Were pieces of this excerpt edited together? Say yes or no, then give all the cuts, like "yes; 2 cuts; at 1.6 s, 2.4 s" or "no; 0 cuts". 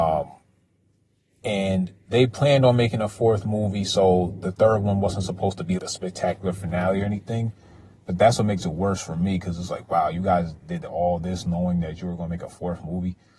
yes; 1 cut; at 5.8 s